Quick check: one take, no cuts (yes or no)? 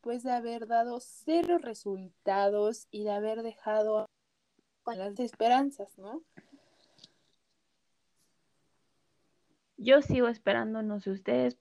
no